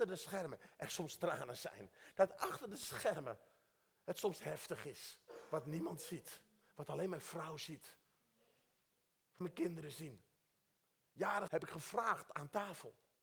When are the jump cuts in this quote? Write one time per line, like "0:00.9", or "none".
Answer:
0:09.4
0:11.5